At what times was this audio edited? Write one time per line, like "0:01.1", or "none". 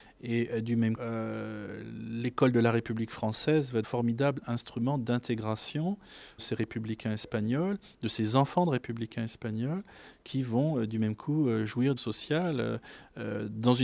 0:01.0
0:03.8
0:06.4
0:12.0